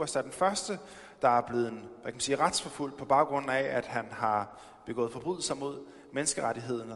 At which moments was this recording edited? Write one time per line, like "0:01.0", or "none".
none